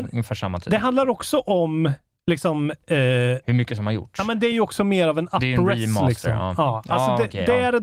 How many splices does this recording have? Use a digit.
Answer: 0